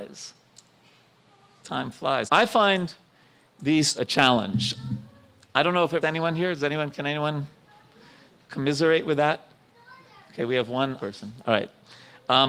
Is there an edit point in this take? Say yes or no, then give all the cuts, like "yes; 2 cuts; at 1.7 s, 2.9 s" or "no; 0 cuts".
yes; 5 cuts; at 1.6 s, 2.3 s, 4.0 s, 6.0 s, 11.0 s